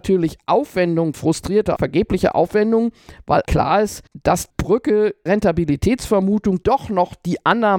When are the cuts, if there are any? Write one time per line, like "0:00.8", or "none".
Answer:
0:01.1
0:01.8
0:03.5
0:04.5
0:05.3
0:06.6